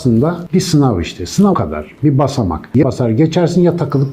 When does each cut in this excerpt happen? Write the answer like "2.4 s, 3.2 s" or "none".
1.5 s, 2.8 s

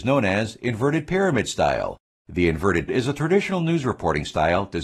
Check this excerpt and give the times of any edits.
2.9 s

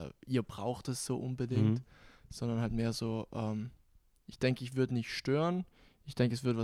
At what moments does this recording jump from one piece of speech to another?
none

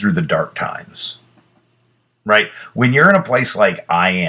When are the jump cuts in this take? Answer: none

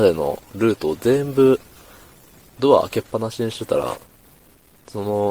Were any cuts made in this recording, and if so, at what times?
none

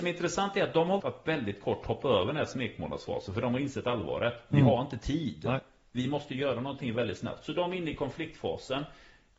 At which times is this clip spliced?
1.0 s

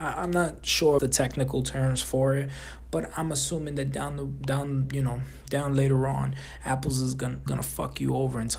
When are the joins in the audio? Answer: 1.0 s, 7.5 s

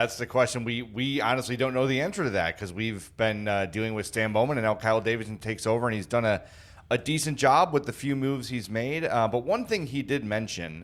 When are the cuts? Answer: none

